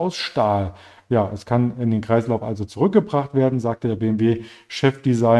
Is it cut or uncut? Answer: uncut